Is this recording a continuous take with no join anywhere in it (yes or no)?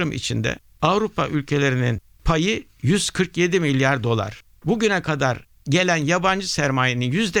yes